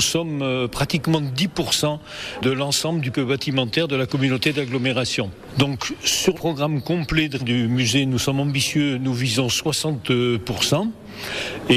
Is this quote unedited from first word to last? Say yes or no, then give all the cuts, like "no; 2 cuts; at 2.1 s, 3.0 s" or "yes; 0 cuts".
no; 3 cuts; at 3.1 s, 6.3 s, 7.4 s